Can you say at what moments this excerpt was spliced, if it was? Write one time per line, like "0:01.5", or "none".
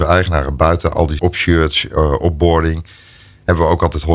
0:01.2